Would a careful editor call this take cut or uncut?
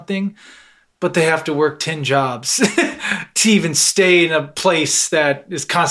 uncut